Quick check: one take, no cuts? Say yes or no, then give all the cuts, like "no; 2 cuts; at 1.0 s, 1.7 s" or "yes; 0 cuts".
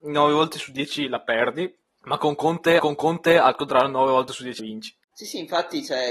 no; 3 cuts; at 1.9 s, 2.8 s, 4.6 s